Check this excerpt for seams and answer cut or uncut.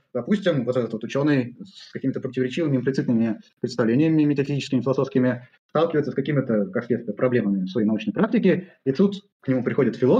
uncut